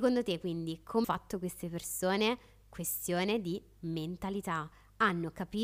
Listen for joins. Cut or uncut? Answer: cut